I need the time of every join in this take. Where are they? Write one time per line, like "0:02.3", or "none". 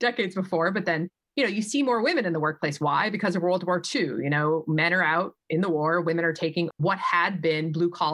0:06.7